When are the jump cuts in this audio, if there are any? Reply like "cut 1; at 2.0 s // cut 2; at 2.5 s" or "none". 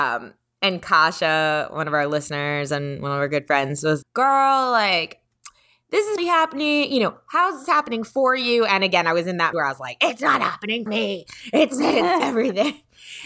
cut 1; at 4.0 s // cut 2; at 6.2 s // cut 3; at 9.5 s // cut 4; at 10.9 s // cut 5; at 12.2 s